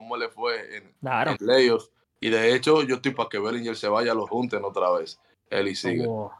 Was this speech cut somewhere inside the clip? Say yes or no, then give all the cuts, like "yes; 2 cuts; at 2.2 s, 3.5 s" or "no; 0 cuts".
yes; 4 cuts; at 1.0 s, 1.4 s, 3.1 s, 4.3 s